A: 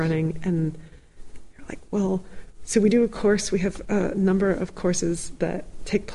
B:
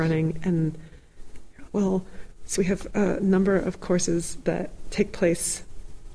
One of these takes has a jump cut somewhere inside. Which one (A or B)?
B